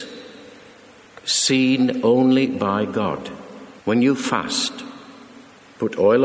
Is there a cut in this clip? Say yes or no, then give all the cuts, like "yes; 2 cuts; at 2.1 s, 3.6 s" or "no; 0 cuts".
yes; 1 cut; at 3.8 s